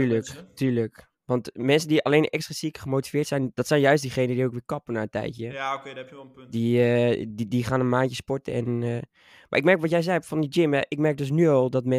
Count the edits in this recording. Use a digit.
0